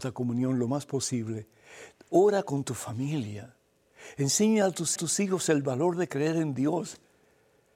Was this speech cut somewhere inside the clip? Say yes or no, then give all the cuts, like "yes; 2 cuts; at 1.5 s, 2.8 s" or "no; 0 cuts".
yes; 1 cut; at 5.0 s